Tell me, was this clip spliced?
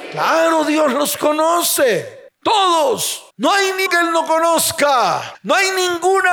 yes; 2 cuts; at 3.3 s, 3.9 s

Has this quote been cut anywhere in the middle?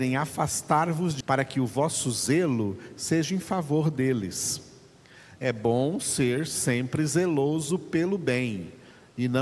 yes; 1 cut; at 1.2 s

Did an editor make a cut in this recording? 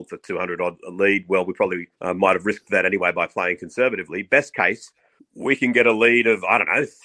yes; 2 cuts; at 1.9 s, 5.2 s

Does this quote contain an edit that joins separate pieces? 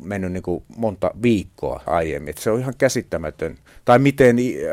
yes; 1 cut; at 1.9 s

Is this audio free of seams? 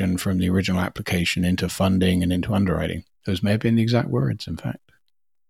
no; 1 cut; at 3.1 s

